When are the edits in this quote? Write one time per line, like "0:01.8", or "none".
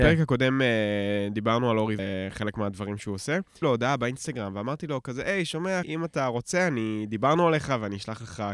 0:02.0
0:03.6
0:05.8